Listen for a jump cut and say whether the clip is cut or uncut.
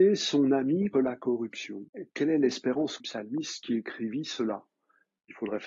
cut